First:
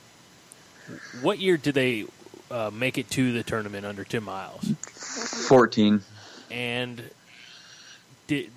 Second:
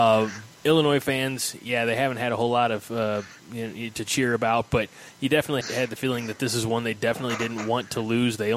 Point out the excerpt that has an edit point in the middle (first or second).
second